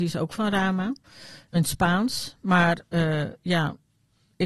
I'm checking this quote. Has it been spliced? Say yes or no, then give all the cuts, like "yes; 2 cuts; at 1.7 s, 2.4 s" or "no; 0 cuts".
yes; 1 cut; at 1.5 s